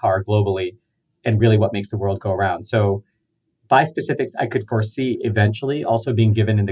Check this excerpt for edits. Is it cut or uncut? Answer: uncut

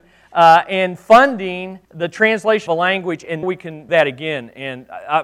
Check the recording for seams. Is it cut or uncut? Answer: cut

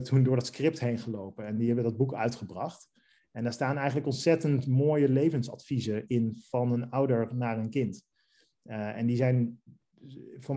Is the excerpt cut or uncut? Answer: uncut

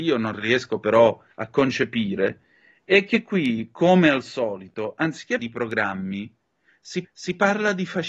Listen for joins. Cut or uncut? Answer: cut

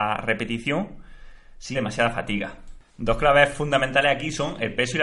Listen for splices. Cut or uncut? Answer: cut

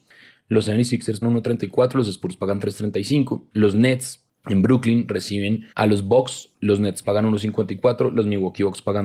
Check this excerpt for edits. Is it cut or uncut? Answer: cut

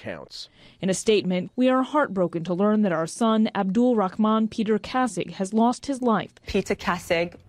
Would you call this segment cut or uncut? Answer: cut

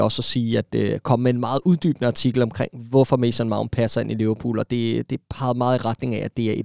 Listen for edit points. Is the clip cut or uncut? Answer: uncut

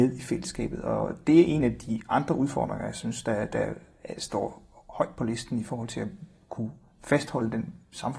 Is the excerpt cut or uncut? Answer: uncut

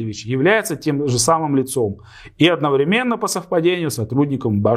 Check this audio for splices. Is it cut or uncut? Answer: uncut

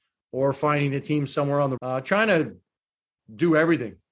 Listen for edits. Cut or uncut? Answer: cut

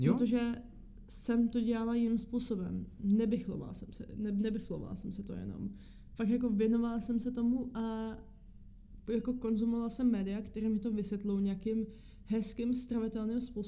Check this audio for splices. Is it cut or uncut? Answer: uncut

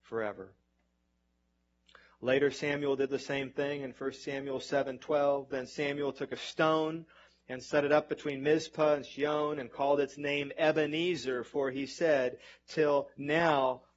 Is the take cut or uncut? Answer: uncut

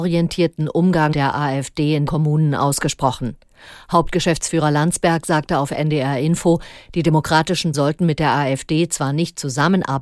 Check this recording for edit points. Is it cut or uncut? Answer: cut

